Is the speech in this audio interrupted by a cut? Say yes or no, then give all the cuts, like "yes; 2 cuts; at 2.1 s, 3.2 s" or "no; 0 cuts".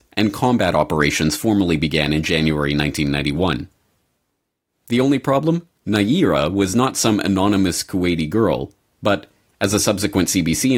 yes; 1 cut; at 5.8 s